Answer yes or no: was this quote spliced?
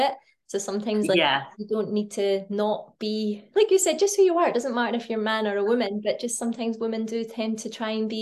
yes